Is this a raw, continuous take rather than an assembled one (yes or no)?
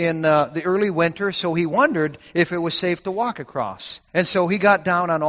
no